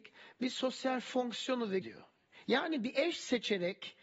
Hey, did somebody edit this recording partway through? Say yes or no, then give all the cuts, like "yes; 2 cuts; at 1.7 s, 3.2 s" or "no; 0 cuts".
yes; 1 cut; at 1.8 s